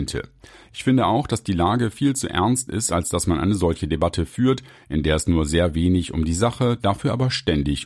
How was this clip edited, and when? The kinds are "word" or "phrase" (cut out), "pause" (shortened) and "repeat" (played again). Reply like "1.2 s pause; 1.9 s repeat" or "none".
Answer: none